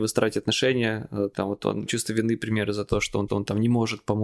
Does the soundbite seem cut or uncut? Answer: cut